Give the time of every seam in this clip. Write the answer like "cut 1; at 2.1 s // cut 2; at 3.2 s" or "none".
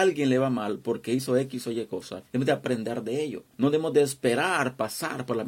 cut 1; at 2.3 s // cut 2; at 3.5 s